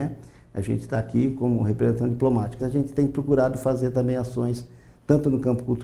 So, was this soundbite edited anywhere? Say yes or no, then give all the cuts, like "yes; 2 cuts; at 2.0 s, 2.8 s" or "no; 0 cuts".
yes; 1 cut; at 2.6 s